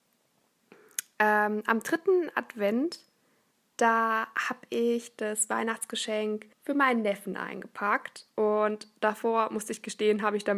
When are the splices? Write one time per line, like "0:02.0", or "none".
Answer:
0:06.5